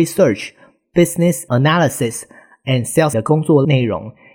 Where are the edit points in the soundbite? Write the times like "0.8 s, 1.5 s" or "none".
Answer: 1.5 s, 3.1 s